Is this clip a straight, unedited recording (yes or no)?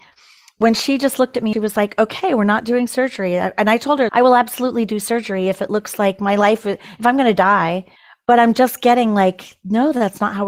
no